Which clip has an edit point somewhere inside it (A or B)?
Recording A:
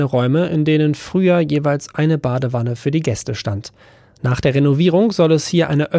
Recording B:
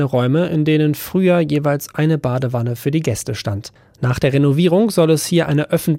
B